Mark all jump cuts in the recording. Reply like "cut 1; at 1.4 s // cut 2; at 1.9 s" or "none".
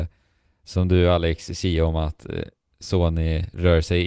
none